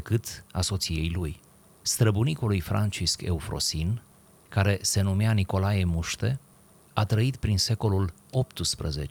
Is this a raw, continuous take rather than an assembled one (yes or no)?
yes